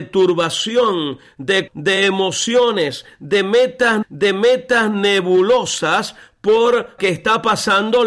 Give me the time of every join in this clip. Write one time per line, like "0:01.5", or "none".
0:01.7
0:04.0
0:07.0